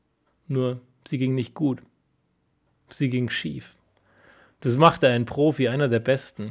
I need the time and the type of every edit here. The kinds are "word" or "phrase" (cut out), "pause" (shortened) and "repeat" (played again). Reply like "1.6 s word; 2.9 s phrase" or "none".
none